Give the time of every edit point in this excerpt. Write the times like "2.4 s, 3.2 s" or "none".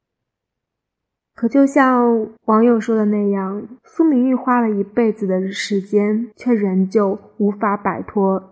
2.4 s, 3.8 s, 6.3 s